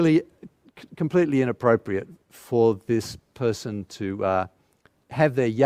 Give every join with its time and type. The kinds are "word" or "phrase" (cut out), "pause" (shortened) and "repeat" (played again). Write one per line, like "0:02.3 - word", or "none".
none